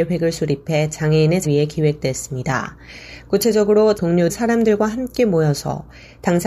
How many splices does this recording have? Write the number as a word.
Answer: three